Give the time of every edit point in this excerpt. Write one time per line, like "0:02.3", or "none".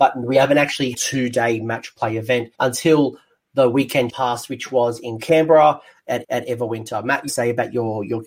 0:00.9
0:02.5
0:04.1
0:06.2
0:07.3